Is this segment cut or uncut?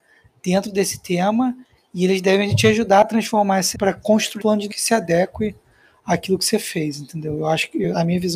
cut